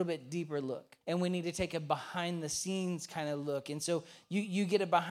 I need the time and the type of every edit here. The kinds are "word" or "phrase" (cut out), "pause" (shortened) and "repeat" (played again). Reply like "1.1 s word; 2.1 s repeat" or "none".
1.0 s pause